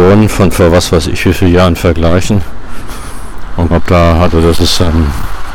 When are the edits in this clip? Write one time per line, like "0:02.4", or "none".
0:03.7